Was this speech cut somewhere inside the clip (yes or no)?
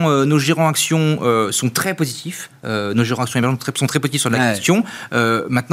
no